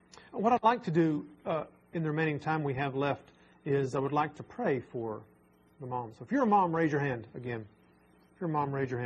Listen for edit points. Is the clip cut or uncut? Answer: uncut